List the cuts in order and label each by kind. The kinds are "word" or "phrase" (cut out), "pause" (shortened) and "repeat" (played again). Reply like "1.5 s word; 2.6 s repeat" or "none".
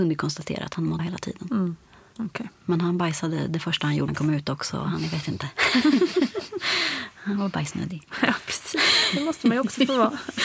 1.0 s word; 4.1 s word